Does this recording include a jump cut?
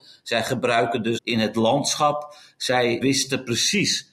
yes; 2 cuts; at 1.2 s, 3.0 s

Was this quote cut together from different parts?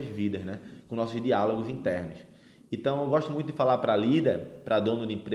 no; 0 cuts

